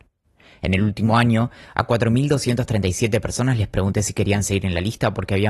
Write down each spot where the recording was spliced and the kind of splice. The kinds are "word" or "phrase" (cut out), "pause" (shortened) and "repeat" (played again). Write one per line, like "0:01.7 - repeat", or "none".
none